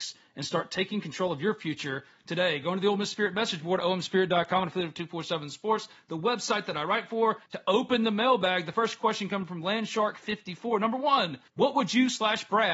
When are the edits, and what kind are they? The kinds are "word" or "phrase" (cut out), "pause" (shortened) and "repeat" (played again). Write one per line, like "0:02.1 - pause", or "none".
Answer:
0:07.5 - pause
0:11.5 - pause